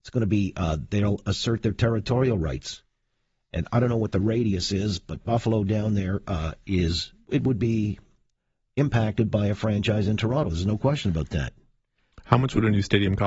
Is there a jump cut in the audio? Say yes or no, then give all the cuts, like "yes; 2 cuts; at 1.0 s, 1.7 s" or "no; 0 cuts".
no; 0 cuts